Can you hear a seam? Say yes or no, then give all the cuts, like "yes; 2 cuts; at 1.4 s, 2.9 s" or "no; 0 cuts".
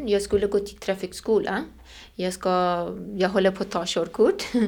no; 0 cuts